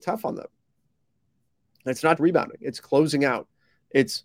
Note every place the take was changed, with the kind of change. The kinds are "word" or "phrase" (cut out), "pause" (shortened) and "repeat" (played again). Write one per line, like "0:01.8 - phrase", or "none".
0:02.2 - word